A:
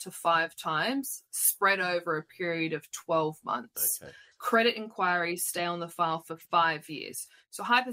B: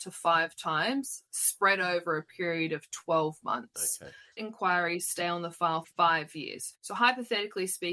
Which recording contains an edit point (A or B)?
B